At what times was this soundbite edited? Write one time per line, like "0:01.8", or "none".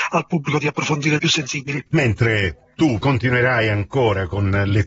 0:01.2
0:03.0